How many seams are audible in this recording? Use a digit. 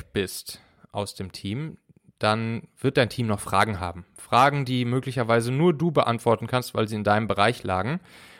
0